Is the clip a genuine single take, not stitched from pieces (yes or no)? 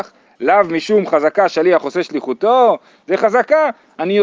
yes